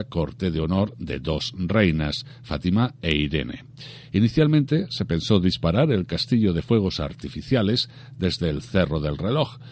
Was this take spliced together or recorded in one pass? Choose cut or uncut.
uncut